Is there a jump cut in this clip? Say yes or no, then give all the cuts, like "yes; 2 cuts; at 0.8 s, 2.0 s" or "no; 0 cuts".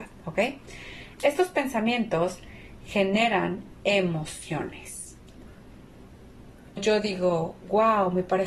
yes; 1 cut; at 6.8 s